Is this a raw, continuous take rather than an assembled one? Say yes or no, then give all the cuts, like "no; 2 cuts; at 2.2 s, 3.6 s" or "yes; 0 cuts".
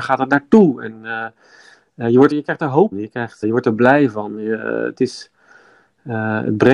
no; 3 cuts; at 2.3 s, 2.9 s, 3.4 s